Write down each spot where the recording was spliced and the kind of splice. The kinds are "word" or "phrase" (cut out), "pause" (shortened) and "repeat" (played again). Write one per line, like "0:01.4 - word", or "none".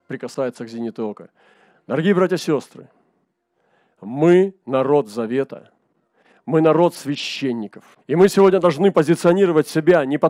0:08.0 - pause